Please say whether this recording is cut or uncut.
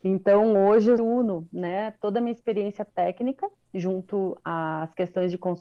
cut